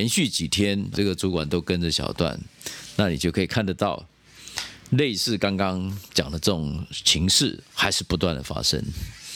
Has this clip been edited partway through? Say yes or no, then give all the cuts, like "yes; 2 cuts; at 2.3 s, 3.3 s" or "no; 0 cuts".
yes; 1 cut; at 0.9 s